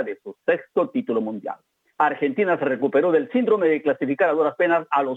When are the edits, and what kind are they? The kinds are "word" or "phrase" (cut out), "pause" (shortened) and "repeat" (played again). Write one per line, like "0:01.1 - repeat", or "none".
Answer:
none